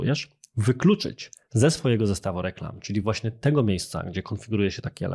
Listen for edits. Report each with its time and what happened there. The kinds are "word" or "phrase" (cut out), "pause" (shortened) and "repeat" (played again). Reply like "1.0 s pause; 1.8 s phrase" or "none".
none